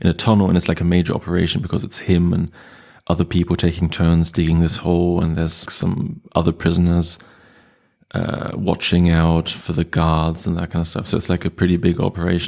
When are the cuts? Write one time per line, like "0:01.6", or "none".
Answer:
0:05.7